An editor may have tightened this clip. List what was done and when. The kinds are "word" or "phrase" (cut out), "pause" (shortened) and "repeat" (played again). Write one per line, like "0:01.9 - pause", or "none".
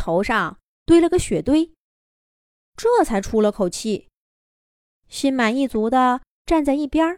none